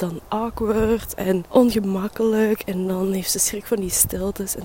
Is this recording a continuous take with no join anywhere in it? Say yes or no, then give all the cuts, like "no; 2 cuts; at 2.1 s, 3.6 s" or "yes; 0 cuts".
yes; 0 cuts